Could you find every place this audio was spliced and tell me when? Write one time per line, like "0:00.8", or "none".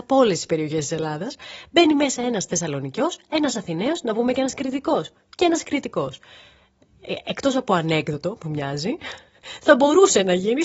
none